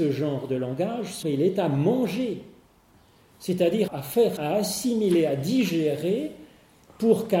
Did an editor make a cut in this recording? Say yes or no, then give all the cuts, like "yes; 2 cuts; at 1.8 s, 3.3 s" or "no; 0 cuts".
yes; 3 cuts; at 1.2 s, 3.9 s, 4.4 s